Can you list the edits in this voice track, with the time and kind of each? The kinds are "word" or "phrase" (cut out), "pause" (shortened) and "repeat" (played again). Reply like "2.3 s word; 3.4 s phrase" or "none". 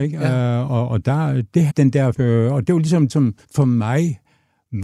1.7 s phrase; 2.1 s word; 2.7 s word; 3.1 s word; 3.4 s pause